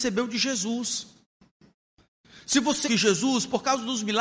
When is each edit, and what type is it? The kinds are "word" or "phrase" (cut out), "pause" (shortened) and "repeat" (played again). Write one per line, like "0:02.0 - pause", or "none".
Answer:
0:02.8 - word